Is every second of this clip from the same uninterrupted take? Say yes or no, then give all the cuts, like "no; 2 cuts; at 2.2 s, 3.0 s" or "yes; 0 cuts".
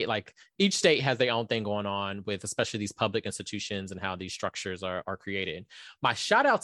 yes; 0 cuts